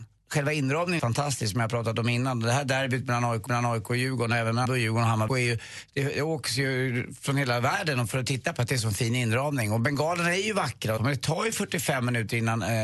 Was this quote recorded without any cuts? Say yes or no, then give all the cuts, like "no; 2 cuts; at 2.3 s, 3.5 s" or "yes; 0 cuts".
no; 6 cuts; at 1.0 s, 3.5 s, 4.6 s, 5.3 s, 8.6 s, 11.0 s